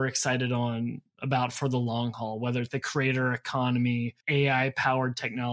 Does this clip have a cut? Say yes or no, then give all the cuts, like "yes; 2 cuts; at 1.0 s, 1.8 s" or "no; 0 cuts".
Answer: yes; 2 cuts; at 2.7 s, 4.2 s